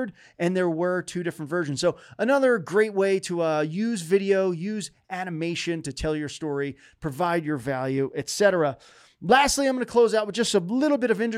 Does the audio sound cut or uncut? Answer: uncut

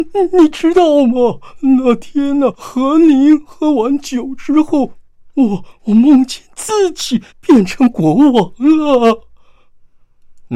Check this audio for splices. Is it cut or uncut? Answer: cut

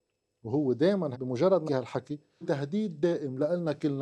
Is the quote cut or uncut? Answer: cut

